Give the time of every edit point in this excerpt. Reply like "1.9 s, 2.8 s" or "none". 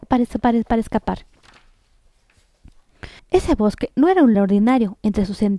3.2 s, 4.3 s